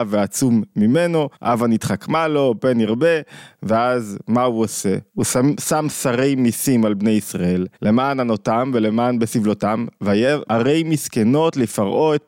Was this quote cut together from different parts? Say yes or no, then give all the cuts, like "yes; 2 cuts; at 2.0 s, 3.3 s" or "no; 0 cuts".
yes; 4 cuts; at 1.3 s, 5.1 s, 7.7 s, 10.4 s